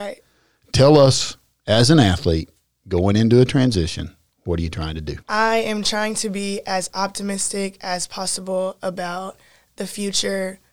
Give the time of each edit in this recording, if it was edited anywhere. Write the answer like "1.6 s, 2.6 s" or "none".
5.2 s